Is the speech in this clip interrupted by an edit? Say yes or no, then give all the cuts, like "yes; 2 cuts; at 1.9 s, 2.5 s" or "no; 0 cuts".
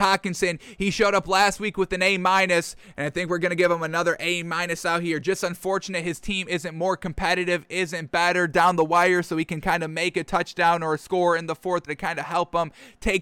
yes; 1 cut; at 11.9 s